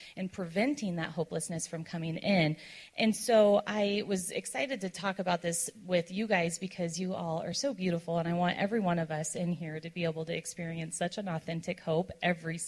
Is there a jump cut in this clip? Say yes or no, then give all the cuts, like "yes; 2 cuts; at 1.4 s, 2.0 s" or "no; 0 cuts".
no; 0 cuts